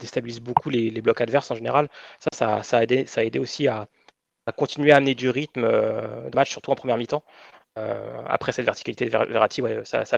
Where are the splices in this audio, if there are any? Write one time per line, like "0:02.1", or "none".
0:06.3